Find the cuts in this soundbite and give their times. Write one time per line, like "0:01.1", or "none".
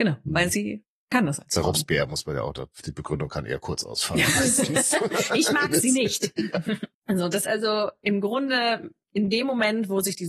0:06.9
0:07.4